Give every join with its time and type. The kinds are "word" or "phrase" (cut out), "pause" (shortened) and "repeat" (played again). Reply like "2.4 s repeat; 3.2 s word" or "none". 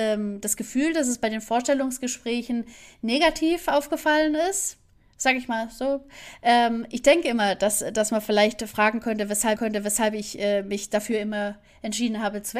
9.6 s repeat